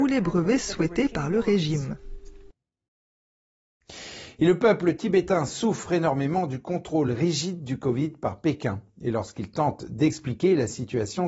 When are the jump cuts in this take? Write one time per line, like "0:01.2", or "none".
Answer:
none